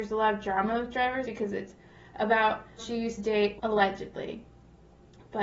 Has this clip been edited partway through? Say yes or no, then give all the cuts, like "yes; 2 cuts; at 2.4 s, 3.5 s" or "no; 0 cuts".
yes; 4 cuts; at 1.2 s, 2.8 s, 3.2 s, 3.6 s